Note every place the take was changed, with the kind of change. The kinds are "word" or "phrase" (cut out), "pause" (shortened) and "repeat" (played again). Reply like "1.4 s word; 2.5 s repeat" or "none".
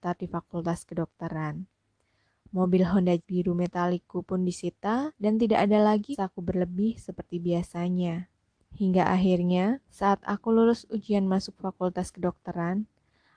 3.2 s word; 5.1 s pause; 6.1 s word; 8.6 s pause; 9.8 s pause